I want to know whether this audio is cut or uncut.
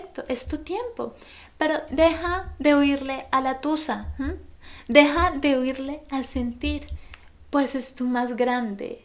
uncut